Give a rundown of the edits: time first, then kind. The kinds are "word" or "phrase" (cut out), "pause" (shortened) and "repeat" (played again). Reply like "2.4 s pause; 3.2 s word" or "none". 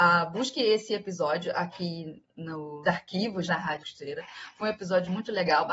2.8 s word; 3.5 s word; 3.8 s word